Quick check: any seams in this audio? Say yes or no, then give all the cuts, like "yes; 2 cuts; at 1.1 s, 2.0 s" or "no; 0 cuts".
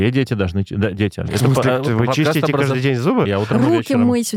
no; 0 cuts